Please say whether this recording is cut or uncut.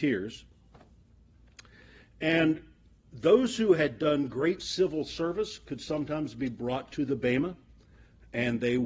uncut